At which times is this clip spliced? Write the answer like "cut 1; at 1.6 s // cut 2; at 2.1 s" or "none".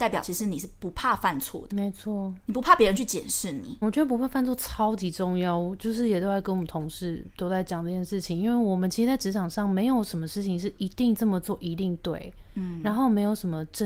cut 1; at 1.7 s // cut 2; at 3.8 s // cut 3; at 7.3 s